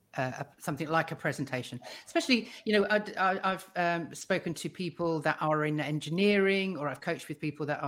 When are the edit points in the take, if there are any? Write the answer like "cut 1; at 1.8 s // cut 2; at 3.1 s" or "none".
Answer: none